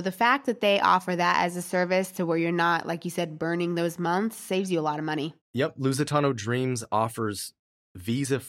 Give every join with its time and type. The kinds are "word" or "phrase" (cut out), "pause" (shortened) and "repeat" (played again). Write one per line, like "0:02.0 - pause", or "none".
0:05.4 - pause